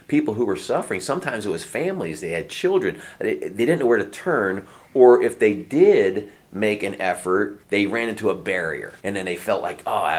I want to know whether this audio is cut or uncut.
cut